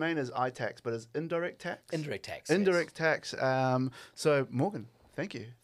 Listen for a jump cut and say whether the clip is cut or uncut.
uncut